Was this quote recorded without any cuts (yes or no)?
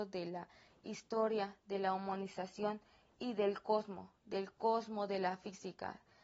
yes